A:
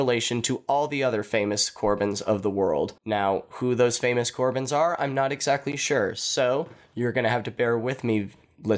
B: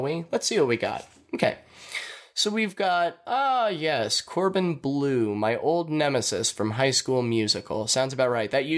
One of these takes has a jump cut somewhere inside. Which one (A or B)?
A